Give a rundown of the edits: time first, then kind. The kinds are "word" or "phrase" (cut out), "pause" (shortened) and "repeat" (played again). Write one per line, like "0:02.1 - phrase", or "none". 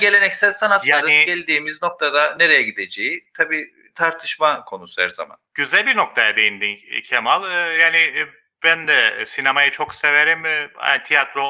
none